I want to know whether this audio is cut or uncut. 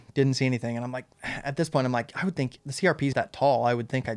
cut